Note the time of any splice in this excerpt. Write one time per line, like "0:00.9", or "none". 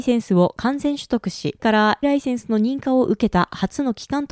0:01.6
0:02.0